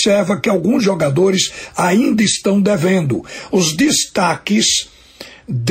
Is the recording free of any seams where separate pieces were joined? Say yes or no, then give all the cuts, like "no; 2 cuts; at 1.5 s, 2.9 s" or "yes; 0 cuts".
yes; 0 cuts